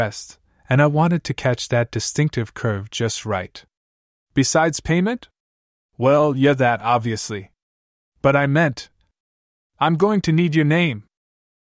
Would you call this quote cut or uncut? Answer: uncut